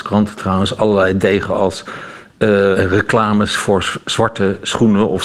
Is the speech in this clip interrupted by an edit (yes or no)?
yes